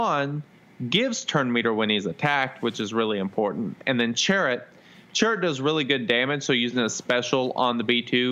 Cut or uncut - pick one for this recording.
uncut